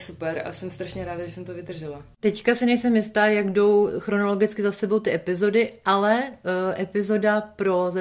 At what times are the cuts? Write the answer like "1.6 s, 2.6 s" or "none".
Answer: none